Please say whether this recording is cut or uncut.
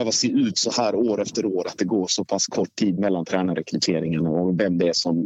uncut